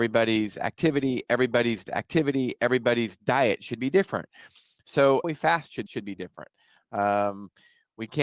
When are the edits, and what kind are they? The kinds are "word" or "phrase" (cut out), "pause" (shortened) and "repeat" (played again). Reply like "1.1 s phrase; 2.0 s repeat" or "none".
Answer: 1.9 s repeat; 5.2 s word; 5.9 s repeat